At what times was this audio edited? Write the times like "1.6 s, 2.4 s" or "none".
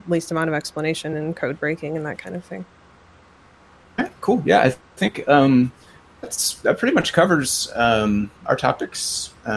none